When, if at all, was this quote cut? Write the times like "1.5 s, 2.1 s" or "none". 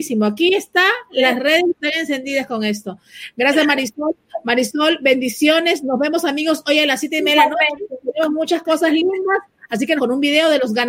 10.0 s